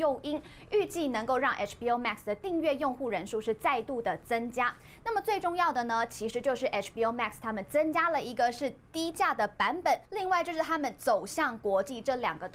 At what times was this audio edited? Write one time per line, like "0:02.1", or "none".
0:10.0